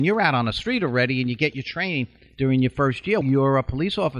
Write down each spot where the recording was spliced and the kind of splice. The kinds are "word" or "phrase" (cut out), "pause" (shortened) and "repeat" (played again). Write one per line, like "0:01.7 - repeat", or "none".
0:03.2 - word

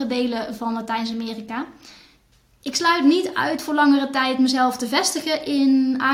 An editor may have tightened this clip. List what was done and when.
none

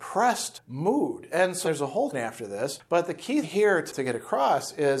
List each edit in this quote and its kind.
0:01.6 - word
0:02.1 - word
0:03.4 - word

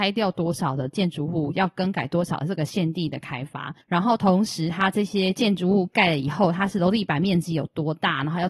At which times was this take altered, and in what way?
0:03.8 - pause

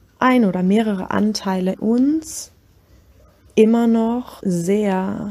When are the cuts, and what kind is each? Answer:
0:01.7 - word
0:04.4 - word

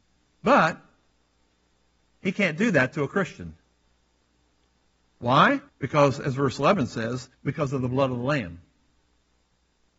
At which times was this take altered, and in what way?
0:05.7 - pause
0:07.3 - pause

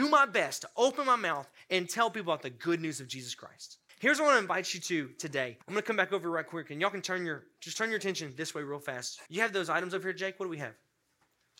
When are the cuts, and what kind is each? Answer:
0:03.9 - pause
0:05.6 - pause
0:09.3 - pause

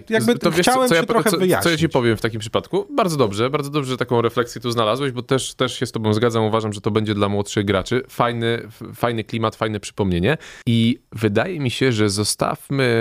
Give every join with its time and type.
0:10.6 - pause

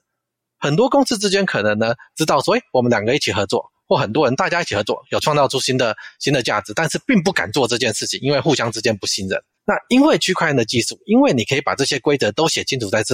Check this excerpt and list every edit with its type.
0:09.6 - pause

